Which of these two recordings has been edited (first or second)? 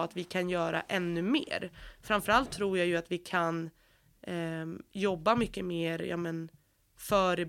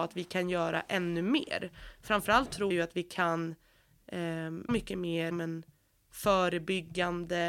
second